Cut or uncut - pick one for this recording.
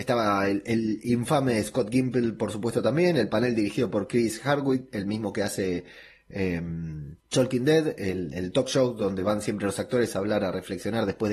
cut